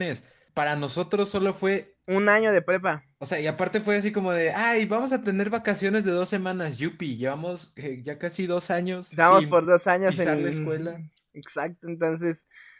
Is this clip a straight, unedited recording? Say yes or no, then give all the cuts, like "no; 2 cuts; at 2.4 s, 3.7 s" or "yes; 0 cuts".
yes; 0 cuts